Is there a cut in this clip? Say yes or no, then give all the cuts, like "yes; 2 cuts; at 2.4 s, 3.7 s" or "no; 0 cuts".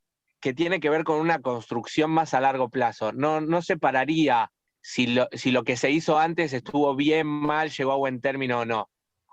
no; 0 cuts